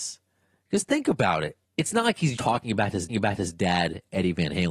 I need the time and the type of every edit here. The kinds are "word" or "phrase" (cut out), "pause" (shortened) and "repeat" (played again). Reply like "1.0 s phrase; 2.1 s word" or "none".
1.6 s pause; 2.4 s word; 3.1 s repeat